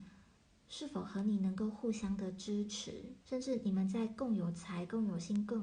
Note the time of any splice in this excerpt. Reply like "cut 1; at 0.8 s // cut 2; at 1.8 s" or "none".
cut 1; at 3.2 s